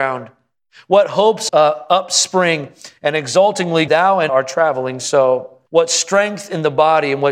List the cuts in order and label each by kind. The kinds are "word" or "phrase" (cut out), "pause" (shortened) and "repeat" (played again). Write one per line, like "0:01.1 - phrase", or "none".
0:01.5 - word
0:03.9 - phrase
0:04.3 - word
0:05.7 - pause